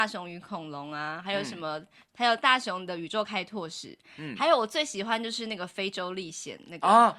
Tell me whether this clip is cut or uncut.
uncut